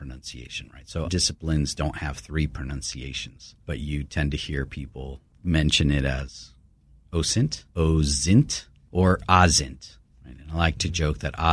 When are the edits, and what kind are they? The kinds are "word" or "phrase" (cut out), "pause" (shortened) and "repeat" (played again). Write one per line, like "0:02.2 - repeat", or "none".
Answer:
0:01.0 - word
0:03.6 - pause
0:07.7 - pause